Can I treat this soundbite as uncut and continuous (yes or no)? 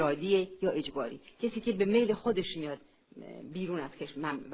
yes